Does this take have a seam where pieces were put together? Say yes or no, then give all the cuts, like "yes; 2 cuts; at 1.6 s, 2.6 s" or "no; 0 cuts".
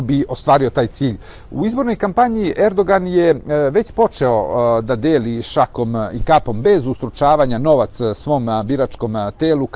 no; 0 cuts